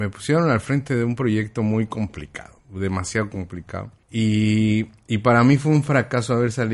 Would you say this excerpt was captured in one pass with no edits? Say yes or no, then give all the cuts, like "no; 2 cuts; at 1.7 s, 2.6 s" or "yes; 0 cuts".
no; 2 cuts; at 2.6 s, 4.0 s